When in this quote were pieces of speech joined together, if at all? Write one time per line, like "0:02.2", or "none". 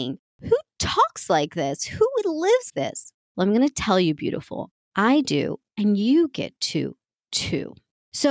0:02.7